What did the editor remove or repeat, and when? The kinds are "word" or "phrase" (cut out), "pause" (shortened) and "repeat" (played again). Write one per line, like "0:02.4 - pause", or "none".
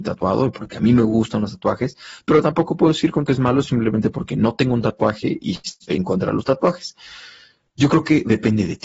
0:03.3 - word